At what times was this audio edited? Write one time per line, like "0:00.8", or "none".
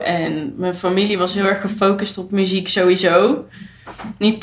none